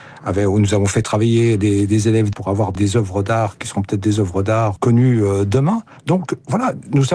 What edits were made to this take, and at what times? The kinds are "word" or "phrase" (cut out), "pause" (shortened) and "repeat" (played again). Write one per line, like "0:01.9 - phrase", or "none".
0:02.3 - phrase
0:02.7 - word
0:04.8 - word